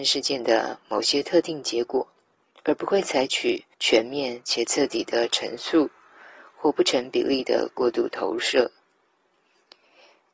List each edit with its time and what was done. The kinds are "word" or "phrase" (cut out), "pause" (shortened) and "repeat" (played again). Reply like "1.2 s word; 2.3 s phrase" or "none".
2.5 s pause; 3.7 s pause